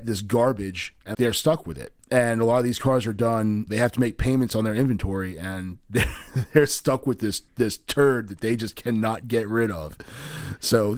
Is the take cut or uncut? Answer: cut